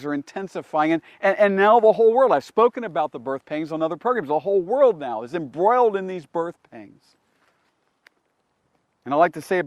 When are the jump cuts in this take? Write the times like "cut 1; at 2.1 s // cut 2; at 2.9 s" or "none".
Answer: none